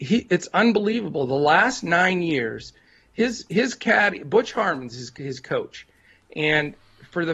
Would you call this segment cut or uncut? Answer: uncut